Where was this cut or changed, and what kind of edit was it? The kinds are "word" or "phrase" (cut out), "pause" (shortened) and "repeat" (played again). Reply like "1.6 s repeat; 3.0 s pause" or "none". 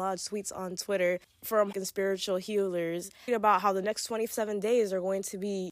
1.7 s word; 3.3 s word